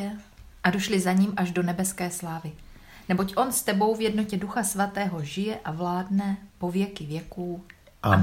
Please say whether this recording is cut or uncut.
uncut